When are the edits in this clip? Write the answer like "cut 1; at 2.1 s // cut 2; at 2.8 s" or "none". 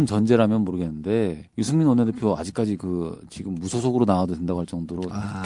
cut 1; at 1.5 s